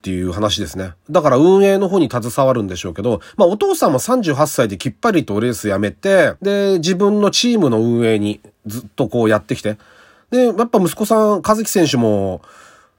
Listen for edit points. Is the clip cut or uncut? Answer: cut